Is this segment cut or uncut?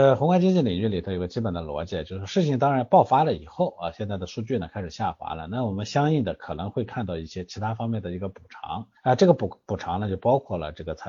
cut